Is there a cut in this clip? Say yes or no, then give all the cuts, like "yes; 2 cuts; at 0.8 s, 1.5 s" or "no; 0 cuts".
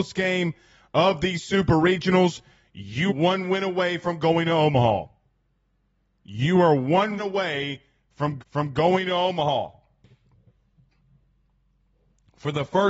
yes; 3 cuts; at 3.1 s, 7.2 s, 8.4 s